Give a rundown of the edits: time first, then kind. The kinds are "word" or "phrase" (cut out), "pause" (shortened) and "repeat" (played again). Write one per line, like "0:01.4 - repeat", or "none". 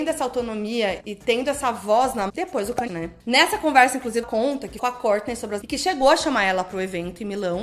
0:01.0 - word
0:02.3 - word
0:02.9 - word
0:04.2 - word
0:04.8 - word
0:05.6 - word